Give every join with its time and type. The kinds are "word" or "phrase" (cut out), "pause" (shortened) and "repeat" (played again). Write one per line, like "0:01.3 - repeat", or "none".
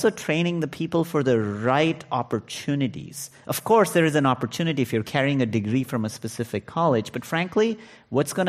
none